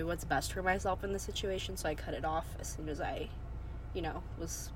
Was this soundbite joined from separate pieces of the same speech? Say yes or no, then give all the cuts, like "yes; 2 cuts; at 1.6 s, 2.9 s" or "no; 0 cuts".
no; 0 cuts